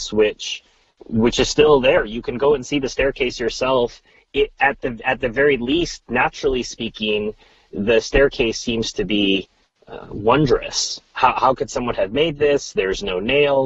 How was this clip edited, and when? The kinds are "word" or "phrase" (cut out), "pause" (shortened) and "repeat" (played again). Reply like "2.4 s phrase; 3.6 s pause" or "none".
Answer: none